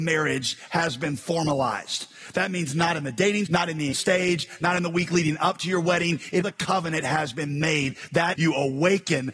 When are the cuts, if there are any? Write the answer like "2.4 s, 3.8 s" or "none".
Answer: 3.5 s, 3.9 s, 6.4 s, 8.3 s